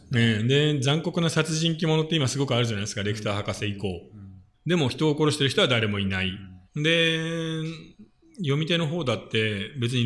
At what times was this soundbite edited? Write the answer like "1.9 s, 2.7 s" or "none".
4.5 s, 6.7 s